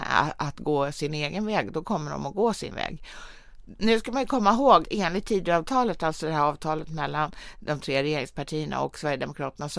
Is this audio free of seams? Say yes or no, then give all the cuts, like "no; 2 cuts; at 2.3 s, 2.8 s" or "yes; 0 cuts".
no; 2 cuts; at 2.7 s, 4.8 s